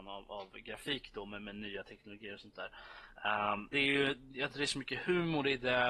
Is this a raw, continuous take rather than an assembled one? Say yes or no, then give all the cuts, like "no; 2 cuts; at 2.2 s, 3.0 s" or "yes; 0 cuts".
no; 2 cuts; at 3.7 s, 4.5 s